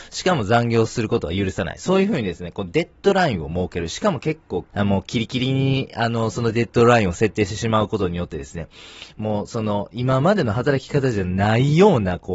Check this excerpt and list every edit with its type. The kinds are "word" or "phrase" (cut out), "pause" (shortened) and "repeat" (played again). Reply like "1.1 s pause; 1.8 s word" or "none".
4.7 s phrase